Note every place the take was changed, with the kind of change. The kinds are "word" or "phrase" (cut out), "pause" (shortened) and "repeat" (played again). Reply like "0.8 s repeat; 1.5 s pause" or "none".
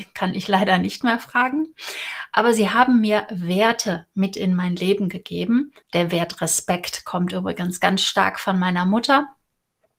5.8 s pause